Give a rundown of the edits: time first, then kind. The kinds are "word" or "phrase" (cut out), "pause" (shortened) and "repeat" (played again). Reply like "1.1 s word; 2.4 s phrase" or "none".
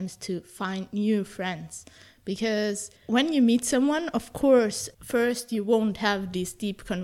3.0 s pause; 4.9 s pause